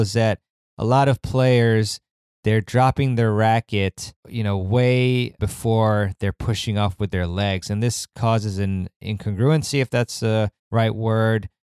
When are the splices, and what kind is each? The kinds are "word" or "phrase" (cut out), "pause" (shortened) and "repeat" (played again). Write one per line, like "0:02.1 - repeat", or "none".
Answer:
0:04.2 - pause
0:05.4 - word
0:10.6 - pause